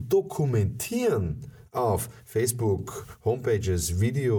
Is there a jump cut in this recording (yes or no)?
no